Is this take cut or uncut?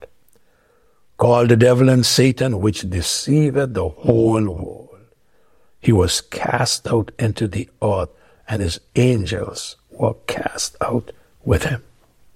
uncut